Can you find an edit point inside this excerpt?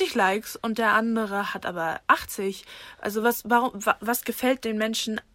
no; 0 cuts

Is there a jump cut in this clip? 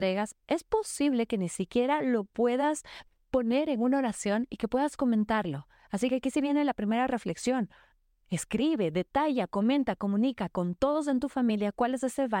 no; 0 cuts

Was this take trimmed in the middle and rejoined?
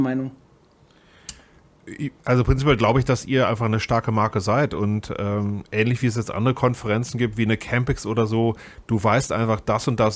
yes; 1 cut; at 2.2 s

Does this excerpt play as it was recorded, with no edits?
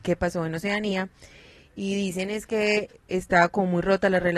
yes; 0 cuts

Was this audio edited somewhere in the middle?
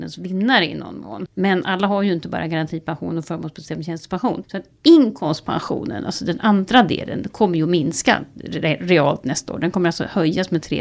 no; 0 cuts

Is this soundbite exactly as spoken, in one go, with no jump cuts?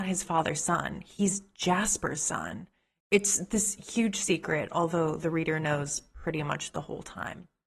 yes; 0 cuts

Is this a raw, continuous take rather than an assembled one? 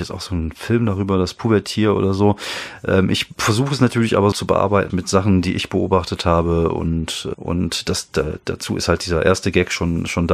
no; 3 cuts; at 4.3 s, 4.9 s, 7.3 s

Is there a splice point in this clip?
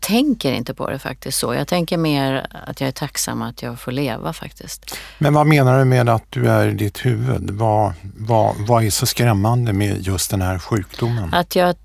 no; 0 cuts

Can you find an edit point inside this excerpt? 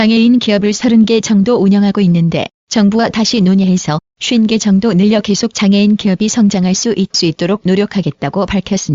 yes; 1 cut; at 7.1 s

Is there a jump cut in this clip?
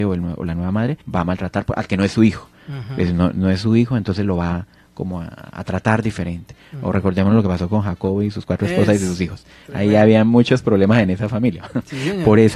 yes; 1 cut; at 1.0 s

